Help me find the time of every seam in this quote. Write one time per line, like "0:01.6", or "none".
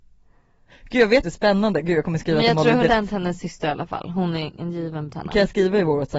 0:01.2
0:02.9
0:05.1